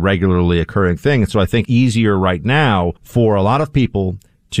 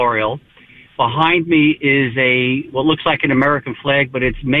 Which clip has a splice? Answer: first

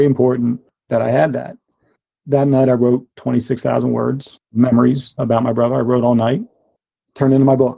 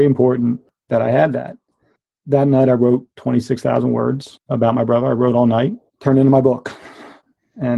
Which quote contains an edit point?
second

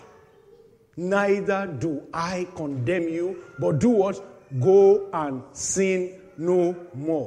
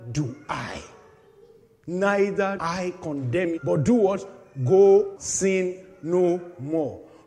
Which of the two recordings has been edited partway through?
second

